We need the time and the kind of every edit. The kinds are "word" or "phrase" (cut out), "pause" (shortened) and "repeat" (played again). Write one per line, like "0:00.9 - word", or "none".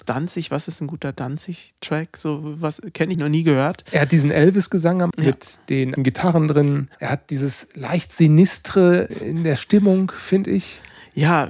0:03.1 - phrase
0:05.1 - word
0:06.0 - word
0:06.9 - pause
0:09.1 - word